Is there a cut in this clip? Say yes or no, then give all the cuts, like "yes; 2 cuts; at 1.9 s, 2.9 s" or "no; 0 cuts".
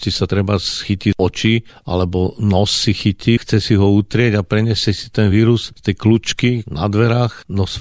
no; 0 cuts